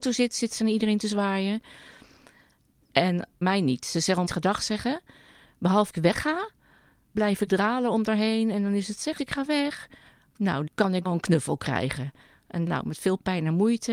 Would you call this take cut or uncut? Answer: cut